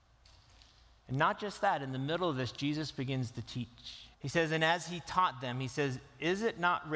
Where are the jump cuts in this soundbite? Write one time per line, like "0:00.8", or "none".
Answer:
0:04.1